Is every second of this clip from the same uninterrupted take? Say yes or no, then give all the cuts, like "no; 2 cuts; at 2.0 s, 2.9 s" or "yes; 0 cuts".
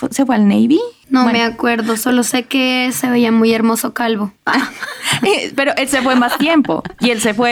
yes; 0 cuts